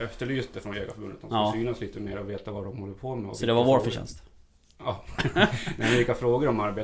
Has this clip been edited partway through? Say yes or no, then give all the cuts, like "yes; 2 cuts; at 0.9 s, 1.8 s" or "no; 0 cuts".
no; 0 cuts